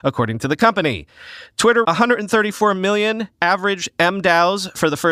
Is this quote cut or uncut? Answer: cut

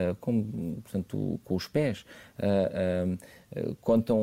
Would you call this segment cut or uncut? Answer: uncut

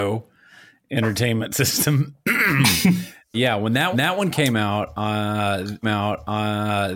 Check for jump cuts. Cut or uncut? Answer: cut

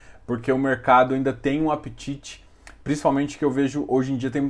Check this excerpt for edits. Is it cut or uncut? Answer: uncut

